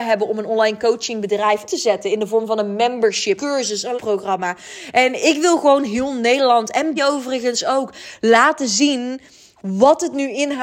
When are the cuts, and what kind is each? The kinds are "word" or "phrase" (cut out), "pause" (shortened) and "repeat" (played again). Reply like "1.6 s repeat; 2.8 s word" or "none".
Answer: 1.7 s word; 3.4 s word; 4.0 s word; 7.0 s word